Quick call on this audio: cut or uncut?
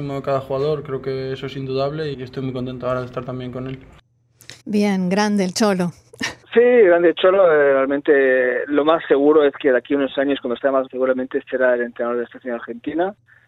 cut